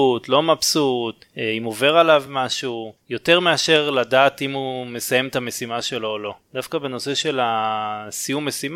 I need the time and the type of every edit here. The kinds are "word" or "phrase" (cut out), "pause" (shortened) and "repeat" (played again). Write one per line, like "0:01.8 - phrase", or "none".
none